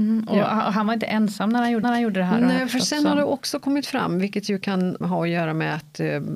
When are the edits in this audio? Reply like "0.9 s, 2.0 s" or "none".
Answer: 1.8 s, 5.0 s